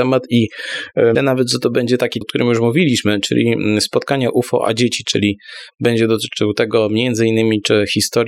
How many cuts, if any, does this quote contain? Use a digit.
2